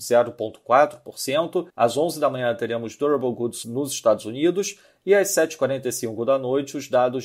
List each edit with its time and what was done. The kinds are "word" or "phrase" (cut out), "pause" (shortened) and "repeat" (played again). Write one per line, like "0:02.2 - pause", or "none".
0:01.7 - pause
0:03.6 - word